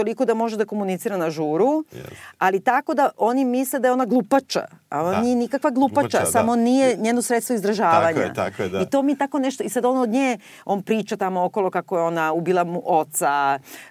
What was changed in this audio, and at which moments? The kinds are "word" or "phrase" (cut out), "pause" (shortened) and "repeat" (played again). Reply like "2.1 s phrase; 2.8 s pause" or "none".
none